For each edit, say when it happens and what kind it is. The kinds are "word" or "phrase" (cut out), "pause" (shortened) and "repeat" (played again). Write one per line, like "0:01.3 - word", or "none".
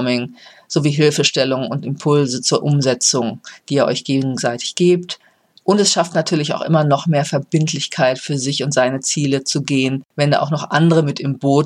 none